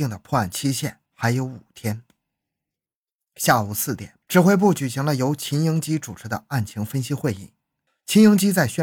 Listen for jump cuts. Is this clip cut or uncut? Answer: cut